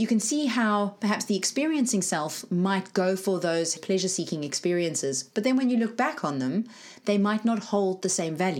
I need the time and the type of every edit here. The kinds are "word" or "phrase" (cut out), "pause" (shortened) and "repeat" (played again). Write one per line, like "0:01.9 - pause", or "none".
none